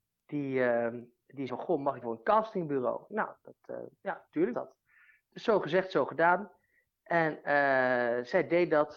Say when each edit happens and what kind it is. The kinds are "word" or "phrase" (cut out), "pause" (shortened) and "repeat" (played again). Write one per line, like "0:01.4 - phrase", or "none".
0:01.5 - word
0:02.0 - phrase
0:03.1 - word
0:04.5 - word